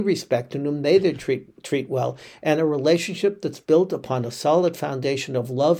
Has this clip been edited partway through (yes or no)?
no